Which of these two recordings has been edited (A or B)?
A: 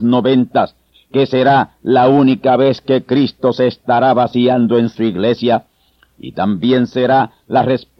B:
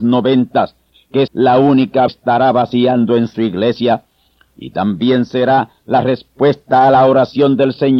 B